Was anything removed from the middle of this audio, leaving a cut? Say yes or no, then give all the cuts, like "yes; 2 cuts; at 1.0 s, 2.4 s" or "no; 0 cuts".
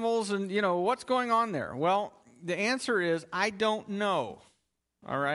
no; 0 cuts